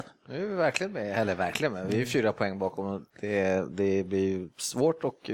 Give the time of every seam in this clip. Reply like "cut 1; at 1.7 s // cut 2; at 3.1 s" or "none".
cut 1; at 3.1 s